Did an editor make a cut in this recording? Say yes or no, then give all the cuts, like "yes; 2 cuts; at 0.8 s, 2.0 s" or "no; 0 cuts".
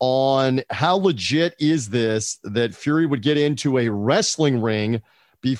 no; 0 cuts